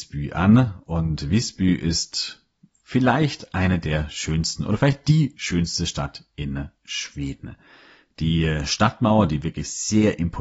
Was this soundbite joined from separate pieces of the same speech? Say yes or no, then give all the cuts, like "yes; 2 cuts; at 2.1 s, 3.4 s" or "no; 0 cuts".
no; 0 cuts